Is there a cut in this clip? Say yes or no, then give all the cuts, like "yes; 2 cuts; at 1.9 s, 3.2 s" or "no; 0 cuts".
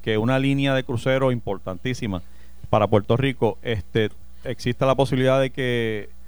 no; 0 cuts